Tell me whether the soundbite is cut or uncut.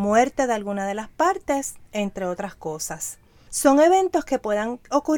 uncut